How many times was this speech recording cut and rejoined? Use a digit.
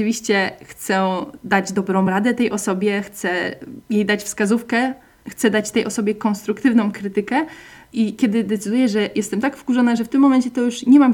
0